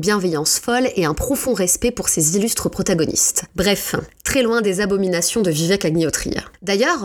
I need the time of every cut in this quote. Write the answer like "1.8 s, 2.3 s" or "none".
none